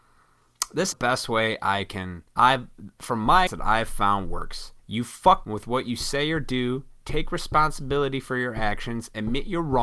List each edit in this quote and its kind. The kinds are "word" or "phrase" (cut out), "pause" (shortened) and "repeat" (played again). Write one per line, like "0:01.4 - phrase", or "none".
0:00.9 - phrase
0:02.3 - pause
0:03.5 - word
0:04.8 - pause
0:05.4 - word